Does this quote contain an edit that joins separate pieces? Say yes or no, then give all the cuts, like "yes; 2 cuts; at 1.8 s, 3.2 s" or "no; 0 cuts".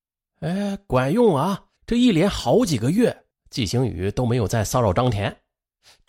yes; 1 cut; at 1.8 s